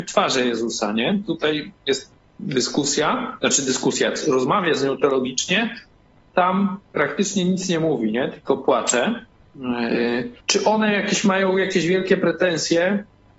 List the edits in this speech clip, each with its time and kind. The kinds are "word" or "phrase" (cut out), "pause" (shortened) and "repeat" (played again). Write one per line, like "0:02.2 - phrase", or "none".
0:10.4 - pause